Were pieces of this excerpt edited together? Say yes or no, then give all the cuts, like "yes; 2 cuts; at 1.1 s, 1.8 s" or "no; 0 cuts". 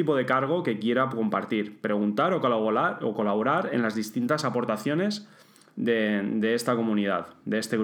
no; 0 cuts